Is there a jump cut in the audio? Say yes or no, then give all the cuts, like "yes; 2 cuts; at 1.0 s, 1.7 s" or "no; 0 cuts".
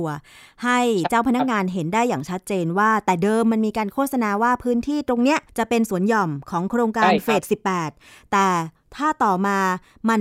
yes; 1 cut; at 5.5 s